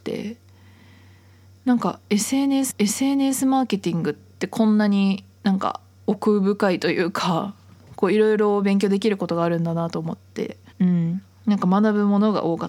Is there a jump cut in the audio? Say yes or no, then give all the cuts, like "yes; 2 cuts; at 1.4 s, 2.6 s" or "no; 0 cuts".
yes; 2 cuts; at 2.7 s, 10.7 s